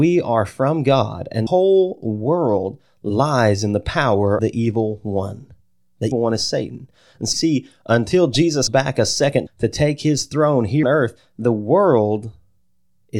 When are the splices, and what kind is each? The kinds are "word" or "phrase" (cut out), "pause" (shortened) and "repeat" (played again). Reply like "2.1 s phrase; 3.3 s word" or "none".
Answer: 1.5 s word; 4.4 s word; 6.1 s word; 7.3 s word; 8.7 s word; 9.5 s word; 10.8 s word